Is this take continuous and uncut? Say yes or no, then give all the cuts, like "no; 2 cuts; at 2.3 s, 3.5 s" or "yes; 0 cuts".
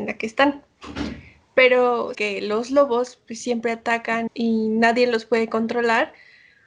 no; 2 cuts; at 2.1 s, 4.3 s